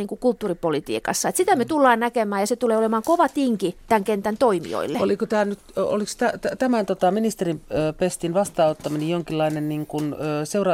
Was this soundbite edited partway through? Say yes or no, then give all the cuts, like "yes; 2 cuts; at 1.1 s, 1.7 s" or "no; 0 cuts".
no; 0 cuts